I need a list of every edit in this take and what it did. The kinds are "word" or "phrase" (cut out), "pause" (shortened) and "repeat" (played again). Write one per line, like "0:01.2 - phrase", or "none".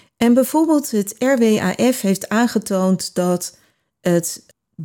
none

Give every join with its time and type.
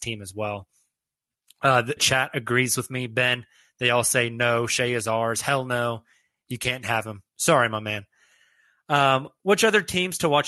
0:02.0 - word

